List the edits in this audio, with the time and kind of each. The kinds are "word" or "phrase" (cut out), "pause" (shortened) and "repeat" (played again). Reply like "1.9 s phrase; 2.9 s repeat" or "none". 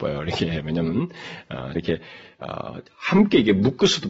1.7 s word; 2.9 s pause